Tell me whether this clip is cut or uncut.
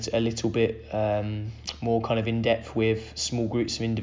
uncut